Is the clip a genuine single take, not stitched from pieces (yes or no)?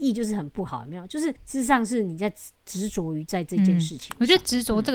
no